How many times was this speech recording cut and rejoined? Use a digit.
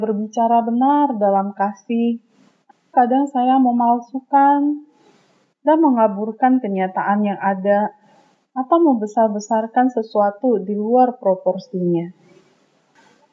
1